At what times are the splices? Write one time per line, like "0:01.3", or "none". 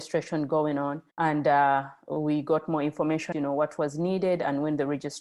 0:01.1
0:03.3